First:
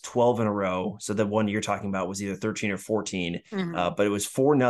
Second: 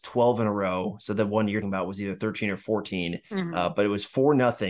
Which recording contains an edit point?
second; 1 cut; at 1.6 s

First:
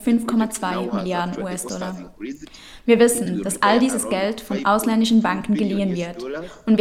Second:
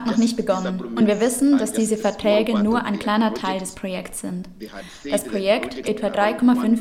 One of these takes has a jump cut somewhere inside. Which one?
second; 1 cut; at 5.8 s

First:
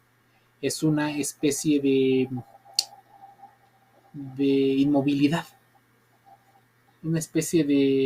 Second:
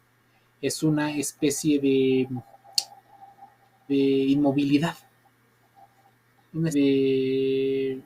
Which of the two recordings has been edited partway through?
second; 2 cuts; at 3.9 s, 6.7 s

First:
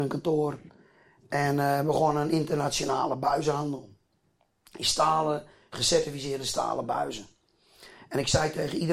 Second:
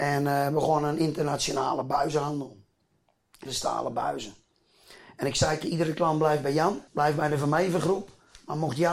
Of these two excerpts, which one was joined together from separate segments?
second; 3 cuts; at 3.5 s, 5.6 s, 6.9 s

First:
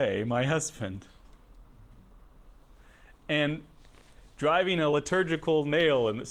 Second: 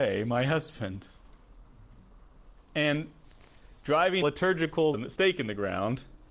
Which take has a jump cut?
second; 3 cuts; at 2.6 s, 4.2 s, 4.9 s

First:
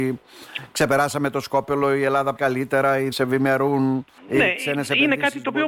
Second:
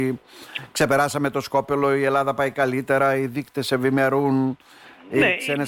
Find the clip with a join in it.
first; 3 cuts; at 2.4 s, 3.1 s, 4.2 s

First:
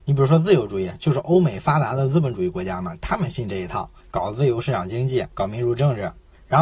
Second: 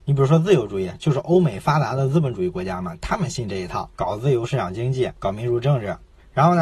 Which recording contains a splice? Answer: second; 1 cut; at 3.9 s

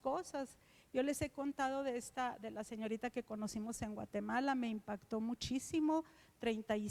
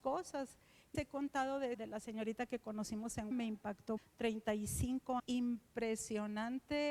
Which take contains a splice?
second; 5 cuts; at 0.9 s, 1.7 s, 3.3 s, 4.0 s, 5.2 s

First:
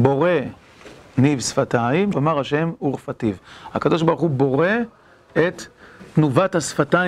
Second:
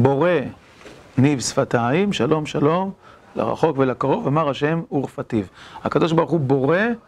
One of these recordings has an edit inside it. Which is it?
first; 1 cut; at 2.1 s

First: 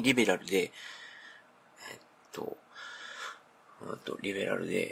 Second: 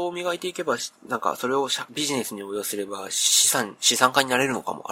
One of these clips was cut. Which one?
second; 1 cut; at 1.9 s

